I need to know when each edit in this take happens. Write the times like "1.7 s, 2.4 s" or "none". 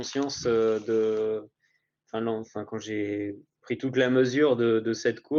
none